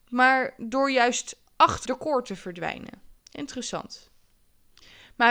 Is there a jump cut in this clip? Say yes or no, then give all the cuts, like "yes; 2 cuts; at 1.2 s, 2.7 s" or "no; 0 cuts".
yes; 2 cuts; at 1.9 s, 3.2 s